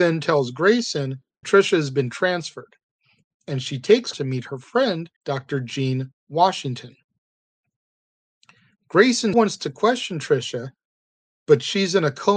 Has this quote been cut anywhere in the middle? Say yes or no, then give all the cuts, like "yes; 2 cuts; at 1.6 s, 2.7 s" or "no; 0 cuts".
yes; 4 cuts; at 1.4 s, 4.1 s, 5.2 s, 9.3 s